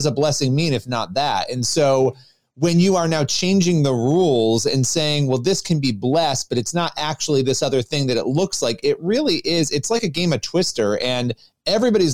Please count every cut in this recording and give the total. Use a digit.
0